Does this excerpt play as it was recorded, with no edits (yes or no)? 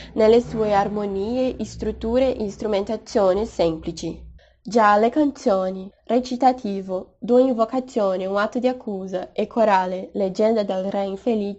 yes